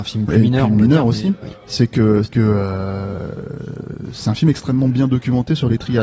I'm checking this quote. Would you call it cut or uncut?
cut